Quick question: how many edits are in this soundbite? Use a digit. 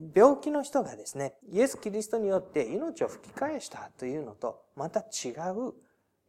1